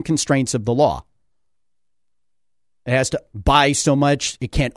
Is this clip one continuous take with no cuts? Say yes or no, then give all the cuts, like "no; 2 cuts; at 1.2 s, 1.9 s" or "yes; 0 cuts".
yes; 0 cuts